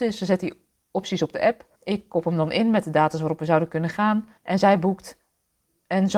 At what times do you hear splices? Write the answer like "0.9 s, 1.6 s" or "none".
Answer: 1.7 s, 4.4 s

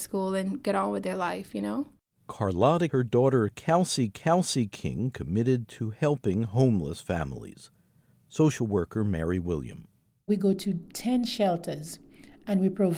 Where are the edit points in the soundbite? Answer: 2.9 s, 4.1 s

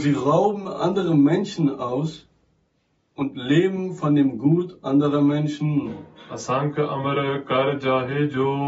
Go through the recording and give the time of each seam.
none

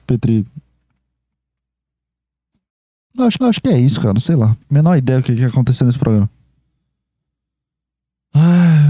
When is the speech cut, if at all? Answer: 3.4 s, 4.6 s

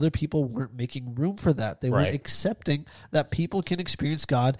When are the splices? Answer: none

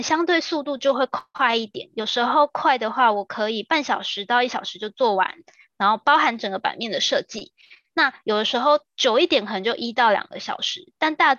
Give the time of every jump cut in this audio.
none

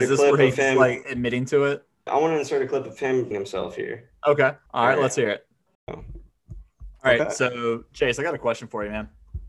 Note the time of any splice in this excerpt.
2.1 s, 3.3 s, 4.7 s, 5.7 s

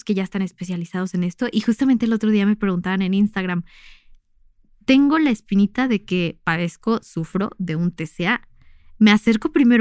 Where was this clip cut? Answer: none

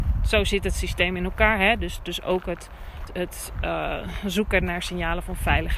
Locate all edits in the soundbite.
3.1 s

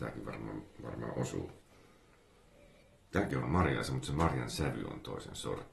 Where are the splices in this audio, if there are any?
3.4 s

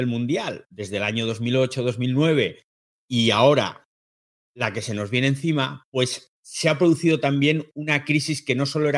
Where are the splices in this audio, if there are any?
none

